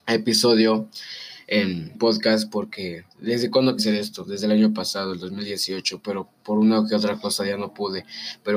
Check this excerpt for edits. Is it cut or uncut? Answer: cut